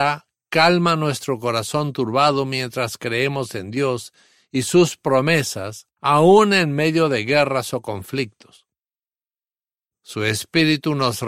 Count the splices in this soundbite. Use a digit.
1